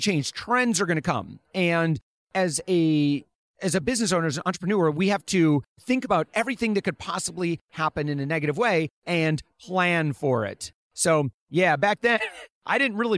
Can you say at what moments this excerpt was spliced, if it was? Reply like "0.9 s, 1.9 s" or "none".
none